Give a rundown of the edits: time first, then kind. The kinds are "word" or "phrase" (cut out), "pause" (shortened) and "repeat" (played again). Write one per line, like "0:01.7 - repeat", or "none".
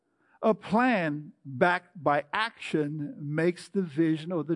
none